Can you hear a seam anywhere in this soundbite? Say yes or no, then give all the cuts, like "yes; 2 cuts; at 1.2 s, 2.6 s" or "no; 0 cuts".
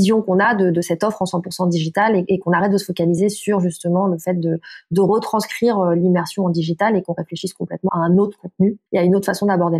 yes; 2 cuts; at 7.9 s, 8.9 s